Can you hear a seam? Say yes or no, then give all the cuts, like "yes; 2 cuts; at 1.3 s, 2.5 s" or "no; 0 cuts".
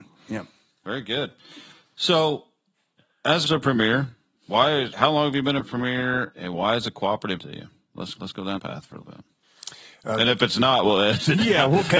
yes; 9 cuts; at 3.5 s, 4.4 s, 4.9 s, 5.6 s, 6.3 s, 7.4 s, 8.2 s, 8.6 s, 9.0 s